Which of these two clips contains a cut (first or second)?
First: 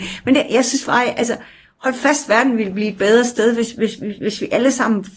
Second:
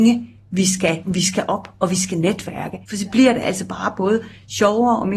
second